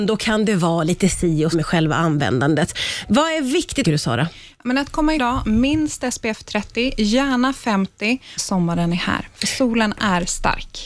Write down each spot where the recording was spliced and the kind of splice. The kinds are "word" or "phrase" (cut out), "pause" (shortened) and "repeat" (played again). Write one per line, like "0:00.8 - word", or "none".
0:01.5 - word
0:03.8 - phrase
0:05.2 - phrase
0:08.4 - phrase